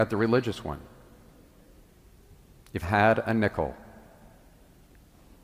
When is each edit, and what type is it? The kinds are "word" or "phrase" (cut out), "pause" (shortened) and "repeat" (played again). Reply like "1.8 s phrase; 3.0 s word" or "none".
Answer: 2.8 s word